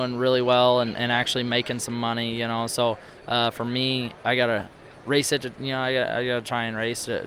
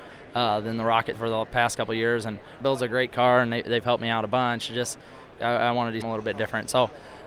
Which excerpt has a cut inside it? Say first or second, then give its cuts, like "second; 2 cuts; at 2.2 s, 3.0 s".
second; 3 cuts; at 1.1 s, 2.6 s, 6.0 s